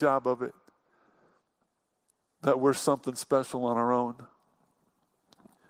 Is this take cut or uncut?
uncut